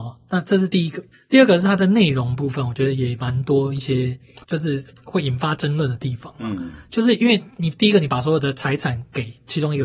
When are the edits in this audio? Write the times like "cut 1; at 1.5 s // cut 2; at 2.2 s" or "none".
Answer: cut 1; at 1.1 s // cut 2; at 4.4 s